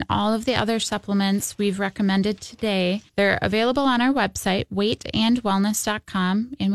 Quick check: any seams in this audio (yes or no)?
yes